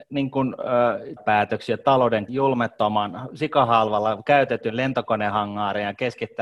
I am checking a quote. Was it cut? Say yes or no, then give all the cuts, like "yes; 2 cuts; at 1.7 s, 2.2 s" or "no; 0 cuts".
yes; 2 cuts; at 1.2 s, 2.3 s